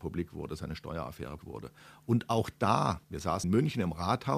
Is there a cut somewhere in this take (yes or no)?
yes